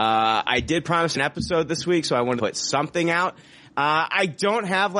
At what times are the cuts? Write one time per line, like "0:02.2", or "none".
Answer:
0:01.1
0:01.7
0:02.4